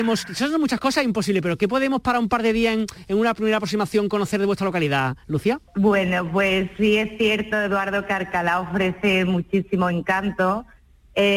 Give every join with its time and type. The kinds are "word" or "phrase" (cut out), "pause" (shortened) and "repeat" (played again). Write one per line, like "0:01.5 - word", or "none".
none

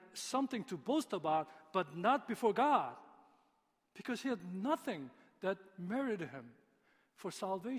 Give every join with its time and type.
none

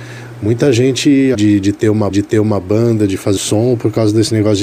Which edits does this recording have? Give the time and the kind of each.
0:01.3 - phrase
0:02.1 - repeat
0:03.4 - word

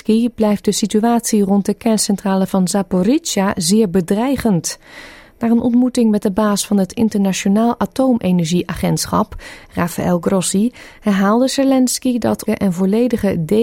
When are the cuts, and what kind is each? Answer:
0:12.5 - word

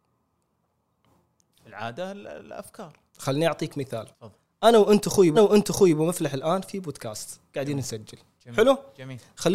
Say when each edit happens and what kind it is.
0:03.1 - pause
0:04.1 - pause
0:05.3 - repeat

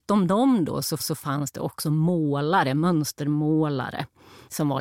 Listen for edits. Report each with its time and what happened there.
0:01.0 - repeat

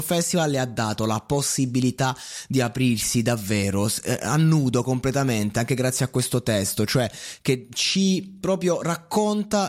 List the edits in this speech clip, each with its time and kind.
none

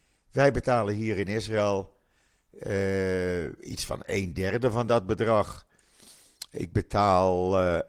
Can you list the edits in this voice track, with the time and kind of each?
none

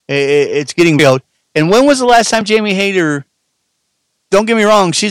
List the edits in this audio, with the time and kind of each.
0:01.0 - word

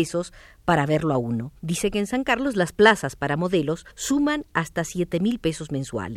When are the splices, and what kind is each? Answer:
0:01.6 - pause
0:03.9 - pause

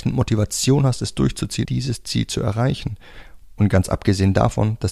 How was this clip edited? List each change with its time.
0:01.6 - word

